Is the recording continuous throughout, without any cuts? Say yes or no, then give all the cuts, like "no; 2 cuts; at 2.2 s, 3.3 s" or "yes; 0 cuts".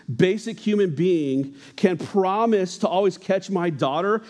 yes; 0 cuts